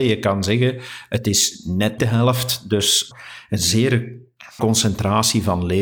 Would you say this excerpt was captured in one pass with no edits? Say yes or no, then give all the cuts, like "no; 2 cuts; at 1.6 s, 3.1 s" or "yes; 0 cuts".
no; 3 cuts; at 2.0 s, 3.1 s, 4.6 s